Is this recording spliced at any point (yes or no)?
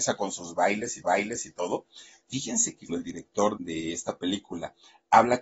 yes